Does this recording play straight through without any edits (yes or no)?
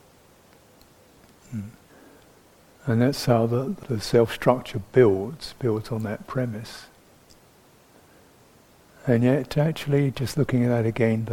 yes